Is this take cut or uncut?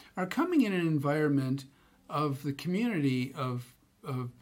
uncut